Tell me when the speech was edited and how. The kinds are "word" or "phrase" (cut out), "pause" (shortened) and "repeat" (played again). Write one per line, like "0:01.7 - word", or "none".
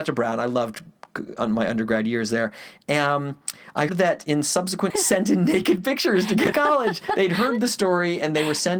0:03.9 - word
0:04.9 - phrase
0:06.5 - word